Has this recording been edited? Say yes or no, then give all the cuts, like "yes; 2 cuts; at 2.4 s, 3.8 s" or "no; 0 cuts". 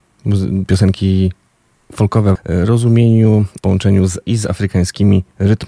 yes; 3 cuts; at 2.4 s, 3.6 s, 4.2 s